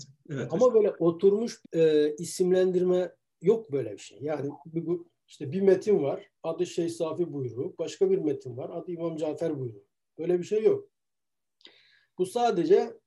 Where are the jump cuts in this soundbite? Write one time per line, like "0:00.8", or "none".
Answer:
0:01.6
0:06.4